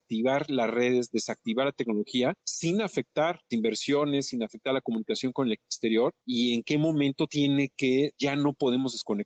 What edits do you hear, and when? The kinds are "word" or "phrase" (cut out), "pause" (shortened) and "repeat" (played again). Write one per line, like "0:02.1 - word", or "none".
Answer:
0:02.4 - pause
0:03.5 - phrase
0:06.2 - pause
0:08.1 - word